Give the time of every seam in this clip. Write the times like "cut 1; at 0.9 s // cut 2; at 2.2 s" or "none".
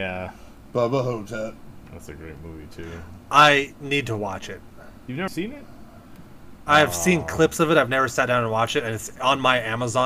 cut 1; at 5.3 s